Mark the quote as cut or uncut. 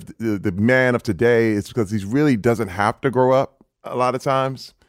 cut